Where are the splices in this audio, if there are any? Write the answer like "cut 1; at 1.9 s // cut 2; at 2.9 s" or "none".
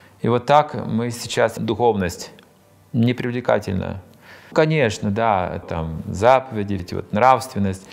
cut 1; at 1.6 s // cut 2; at 4.5 s // cut 3; at 5.6 s // cut 4; at 6.8 s